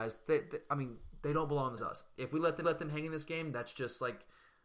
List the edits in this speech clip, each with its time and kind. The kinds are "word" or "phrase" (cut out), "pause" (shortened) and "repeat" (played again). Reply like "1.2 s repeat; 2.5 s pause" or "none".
1.8 s phrase; 2.6 s repeat